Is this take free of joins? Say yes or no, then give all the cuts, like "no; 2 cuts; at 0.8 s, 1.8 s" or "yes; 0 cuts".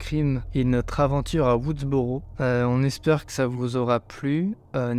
yes; 0 cuts